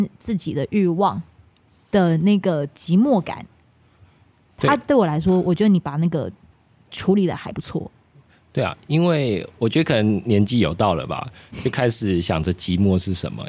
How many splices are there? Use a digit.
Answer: 0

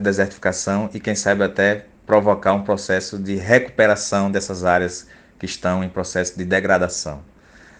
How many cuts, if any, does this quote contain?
0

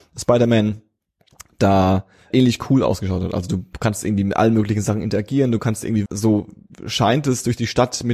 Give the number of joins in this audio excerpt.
2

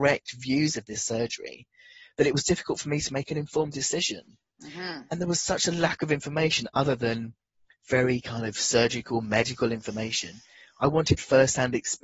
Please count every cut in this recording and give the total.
0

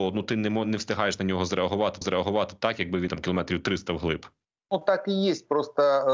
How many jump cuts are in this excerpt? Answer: 3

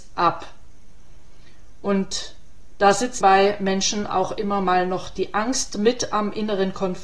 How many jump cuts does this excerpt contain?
1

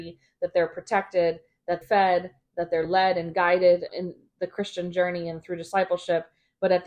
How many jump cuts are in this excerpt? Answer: 2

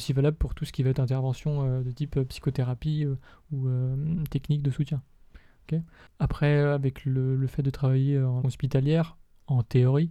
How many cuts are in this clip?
1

